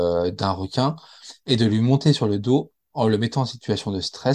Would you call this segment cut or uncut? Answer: uncut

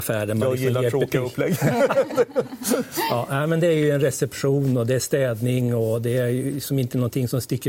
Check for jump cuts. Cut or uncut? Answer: uncut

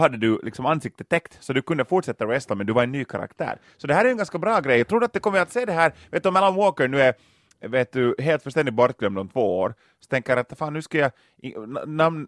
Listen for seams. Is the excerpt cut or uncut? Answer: uncut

